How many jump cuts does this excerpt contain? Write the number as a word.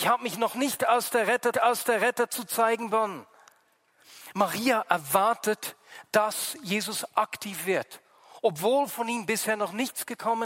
one